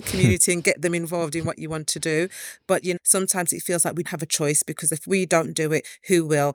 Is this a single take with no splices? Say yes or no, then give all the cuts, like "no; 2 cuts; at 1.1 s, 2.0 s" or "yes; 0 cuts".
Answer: no; 2 cuts; at 3.0 s, 4.0 s